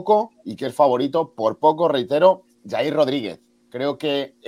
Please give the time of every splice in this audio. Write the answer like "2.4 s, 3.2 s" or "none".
none